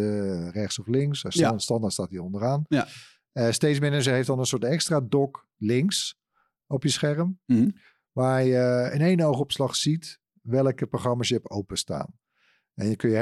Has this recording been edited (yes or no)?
no